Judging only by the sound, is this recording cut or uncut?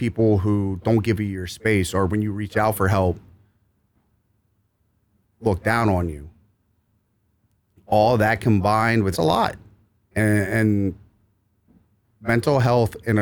cut